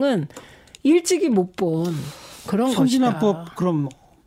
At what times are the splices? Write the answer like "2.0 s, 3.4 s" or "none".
none